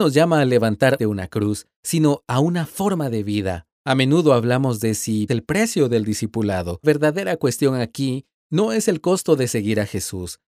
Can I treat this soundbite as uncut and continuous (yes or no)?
no